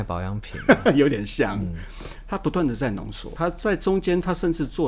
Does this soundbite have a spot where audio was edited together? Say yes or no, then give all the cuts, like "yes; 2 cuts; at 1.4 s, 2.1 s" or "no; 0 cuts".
yes; 1 cut; at 3.4 s